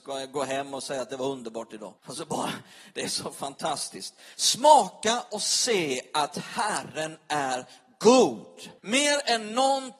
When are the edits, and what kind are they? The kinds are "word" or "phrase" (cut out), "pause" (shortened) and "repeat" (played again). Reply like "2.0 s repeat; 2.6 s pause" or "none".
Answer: 2.0 s pause; 8.8 s pause